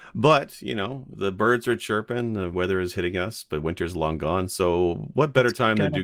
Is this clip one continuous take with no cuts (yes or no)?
no